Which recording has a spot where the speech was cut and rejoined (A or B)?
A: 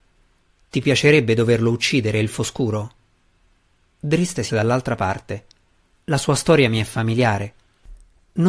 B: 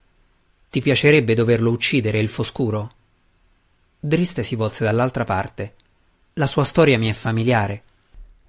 A